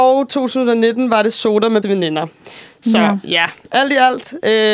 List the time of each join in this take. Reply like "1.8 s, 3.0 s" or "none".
1.8 s